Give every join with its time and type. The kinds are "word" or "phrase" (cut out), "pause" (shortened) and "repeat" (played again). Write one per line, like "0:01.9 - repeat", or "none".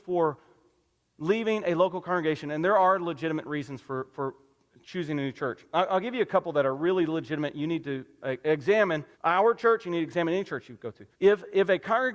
0:09.1 - pause
0:11.1 - pause